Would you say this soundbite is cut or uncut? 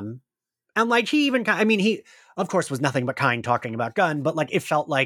uncut